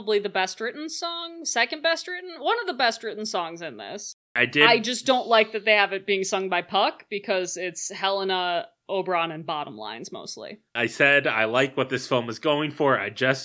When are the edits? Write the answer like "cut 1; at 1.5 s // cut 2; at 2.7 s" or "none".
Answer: cut 1; at 10.7 s